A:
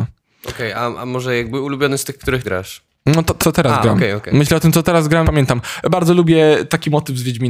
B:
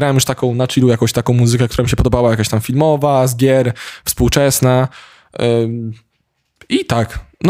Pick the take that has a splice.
A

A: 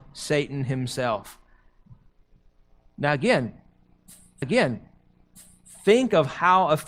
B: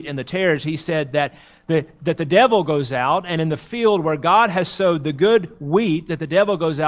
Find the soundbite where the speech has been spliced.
A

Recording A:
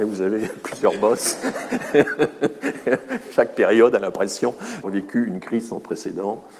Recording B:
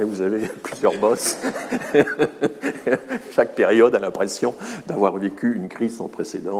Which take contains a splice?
A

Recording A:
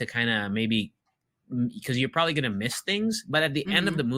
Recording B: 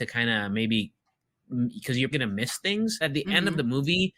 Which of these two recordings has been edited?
B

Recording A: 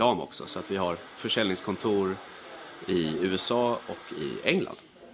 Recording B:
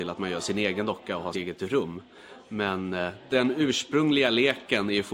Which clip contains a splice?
B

